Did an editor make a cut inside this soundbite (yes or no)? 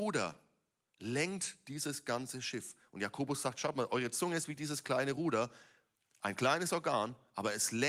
no